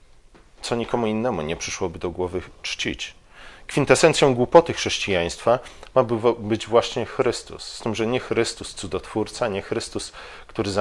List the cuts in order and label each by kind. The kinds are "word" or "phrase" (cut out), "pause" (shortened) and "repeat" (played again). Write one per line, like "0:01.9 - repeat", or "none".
0:02.6 - pause